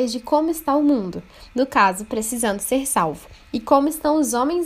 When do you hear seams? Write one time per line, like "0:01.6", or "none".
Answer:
none